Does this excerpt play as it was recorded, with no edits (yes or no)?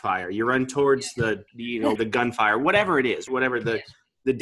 no